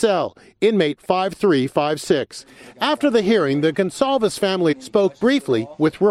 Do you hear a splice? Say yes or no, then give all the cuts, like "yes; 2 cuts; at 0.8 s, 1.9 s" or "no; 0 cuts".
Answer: yes; 2 cuts; at 1.0 s, 4.7 s